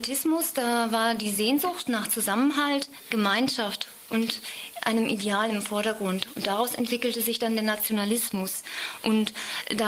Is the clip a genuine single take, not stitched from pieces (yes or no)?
yes